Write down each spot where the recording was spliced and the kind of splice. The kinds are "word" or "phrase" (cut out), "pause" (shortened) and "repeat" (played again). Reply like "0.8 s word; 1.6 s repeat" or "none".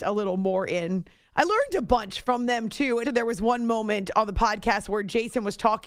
3.0 s word